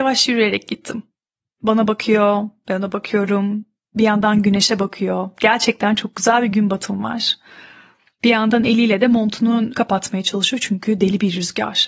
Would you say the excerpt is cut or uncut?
cut